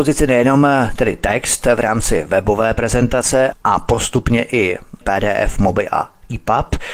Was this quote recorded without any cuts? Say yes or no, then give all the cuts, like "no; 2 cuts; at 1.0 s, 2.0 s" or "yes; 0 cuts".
no; 1 cut; at 5.0 s